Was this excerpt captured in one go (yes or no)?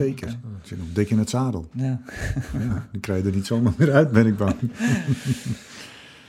yes